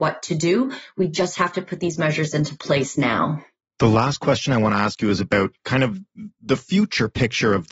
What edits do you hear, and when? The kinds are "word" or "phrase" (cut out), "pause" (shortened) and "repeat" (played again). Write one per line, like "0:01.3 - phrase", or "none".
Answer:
none